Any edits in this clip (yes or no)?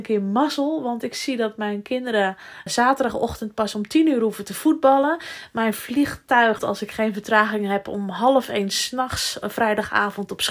yes